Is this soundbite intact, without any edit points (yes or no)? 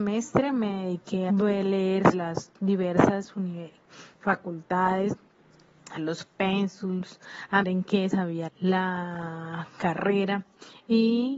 no